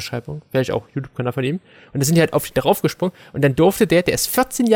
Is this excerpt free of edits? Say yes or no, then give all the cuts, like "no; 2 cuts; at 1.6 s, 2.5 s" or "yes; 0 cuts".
yes; 0 cuts